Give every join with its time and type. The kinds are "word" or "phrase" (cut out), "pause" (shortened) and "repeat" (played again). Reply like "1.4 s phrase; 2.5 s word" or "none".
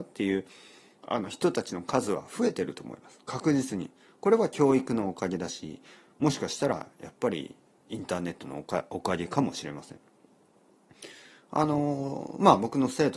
none